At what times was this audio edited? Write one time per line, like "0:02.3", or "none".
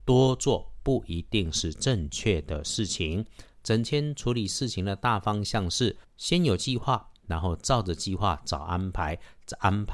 0:06.0